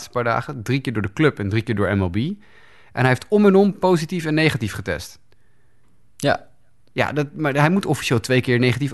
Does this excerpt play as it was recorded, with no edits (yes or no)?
yes